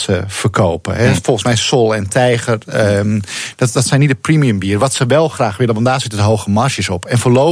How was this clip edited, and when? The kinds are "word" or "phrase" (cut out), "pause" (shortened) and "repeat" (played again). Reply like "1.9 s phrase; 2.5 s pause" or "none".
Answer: none